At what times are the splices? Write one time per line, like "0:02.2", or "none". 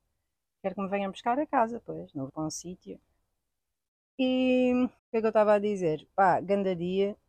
0:02.3
0:05.0